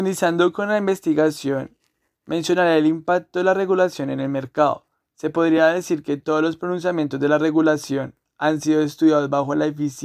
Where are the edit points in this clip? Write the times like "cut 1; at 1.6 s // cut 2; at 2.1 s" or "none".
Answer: none